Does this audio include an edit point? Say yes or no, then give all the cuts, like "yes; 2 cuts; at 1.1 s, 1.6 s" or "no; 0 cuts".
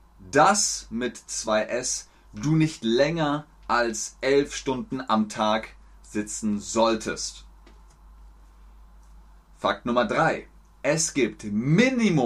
no; 0 cuts